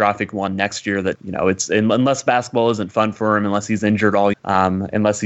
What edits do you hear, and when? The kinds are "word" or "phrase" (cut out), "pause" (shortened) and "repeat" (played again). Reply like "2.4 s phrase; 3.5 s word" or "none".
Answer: 1.1 s word; 4.3 s word